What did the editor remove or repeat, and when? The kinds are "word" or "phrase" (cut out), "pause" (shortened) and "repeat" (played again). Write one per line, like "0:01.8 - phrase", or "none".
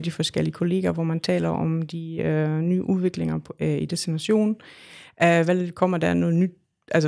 none